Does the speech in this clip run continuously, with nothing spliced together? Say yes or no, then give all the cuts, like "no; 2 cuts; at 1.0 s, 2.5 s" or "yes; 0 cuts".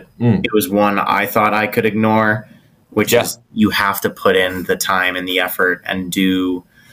yes; 0 cuts